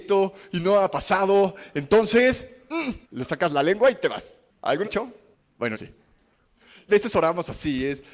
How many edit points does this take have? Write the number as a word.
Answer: four